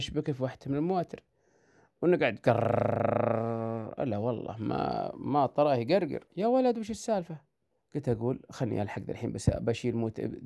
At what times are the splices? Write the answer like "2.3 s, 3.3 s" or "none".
6.3 s, 7.7 s